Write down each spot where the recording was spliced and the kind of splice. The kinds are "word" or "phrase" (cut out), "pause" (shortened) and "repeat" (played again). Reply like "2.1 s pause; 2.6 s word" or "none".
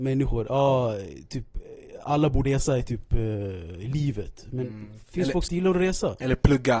2.4 s word; 5.0 s pause; 5.5 s word